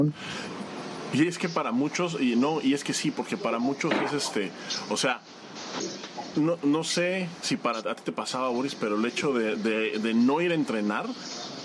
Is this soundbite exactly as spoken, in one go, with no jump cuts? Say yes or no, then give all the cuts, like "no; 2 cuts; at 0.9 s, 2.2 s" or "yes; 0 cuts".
yes; 0 cuts